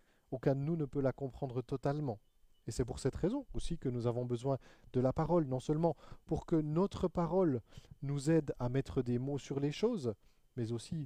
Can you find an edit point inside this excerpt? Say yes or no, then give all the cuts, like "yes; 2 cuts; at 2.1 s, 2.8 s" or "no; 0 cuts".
no; 0 cuts